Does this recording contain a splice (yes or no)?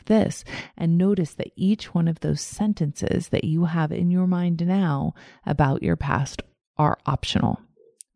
no